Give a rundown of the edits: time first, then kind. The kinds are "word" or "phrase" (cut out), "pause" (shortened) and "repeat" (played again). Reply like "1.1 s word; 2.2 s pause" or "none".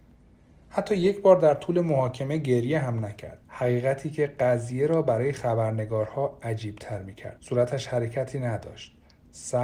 3.4 s pause; 7.4 s pause

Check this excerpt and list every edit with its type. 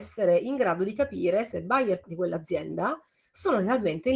1.5 s word; 2.0 s word

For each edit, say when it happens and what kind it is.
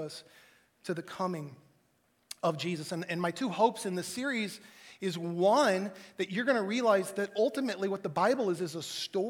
none

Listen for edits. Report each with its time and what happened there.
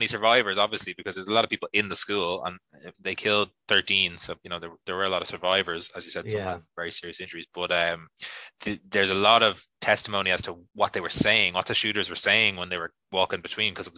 2.9 s pause; 10.7 s pause

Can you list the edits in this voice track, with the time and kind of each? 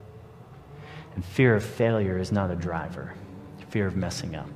none

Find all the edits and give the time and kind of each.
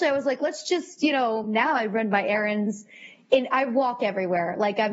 none

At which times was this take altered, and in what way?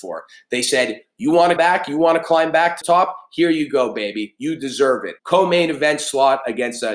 1.6 s word; 2.8 s word; 5.2 s pause

